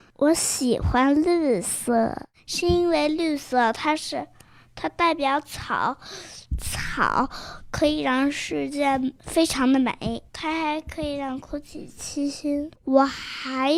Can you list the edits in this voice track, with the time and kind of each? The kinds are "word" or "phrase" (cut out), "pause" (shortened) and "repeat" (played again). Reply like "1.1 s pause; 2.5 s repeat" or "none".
9.2 s pause; 10.3 s pause; 12.8 s pause